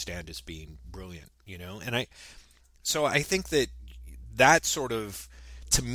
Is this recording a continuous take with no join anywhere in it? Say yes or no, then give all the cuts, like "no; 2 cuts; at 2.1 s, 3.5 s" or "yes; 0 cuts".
yes; 0 cuts